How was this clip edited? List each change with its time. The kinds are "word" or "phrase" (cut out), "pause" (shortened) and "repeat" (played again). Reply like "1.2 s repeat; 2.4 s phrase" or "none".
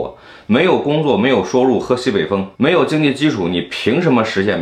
2.5 s pause

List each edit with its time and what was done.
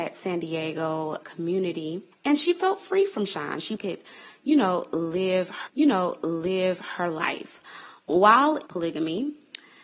1.2 s word; 2.1 s pause; 3.8 s phrase; 5.7 s repeat; 8.7 s phrase

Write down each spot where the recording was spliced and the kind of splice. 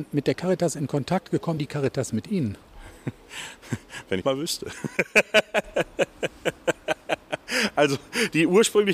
1.6 s word; 4.2 s phrase

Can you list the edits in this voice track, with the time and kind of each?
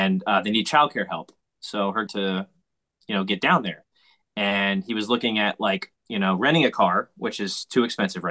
2.1 s phrase

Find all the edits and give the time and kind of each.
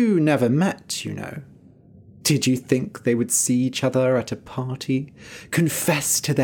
none

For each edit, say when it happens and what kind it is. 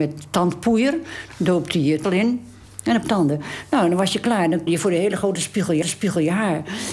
2.0 s word; 3.0 s word; 4.7 s word; 5.8 s repeat

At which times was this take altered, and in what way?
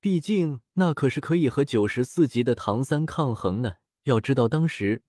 3.9 s pause

